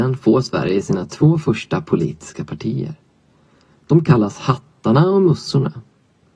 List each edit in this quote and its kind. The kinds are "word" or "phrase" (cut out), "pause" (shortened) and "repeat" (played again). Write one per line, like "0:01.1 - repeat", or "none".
none